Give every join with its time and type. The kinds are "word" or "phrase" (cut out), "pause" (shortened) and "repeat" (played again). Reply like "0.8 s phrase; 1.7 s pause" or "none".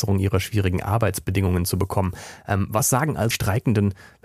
3.3 s word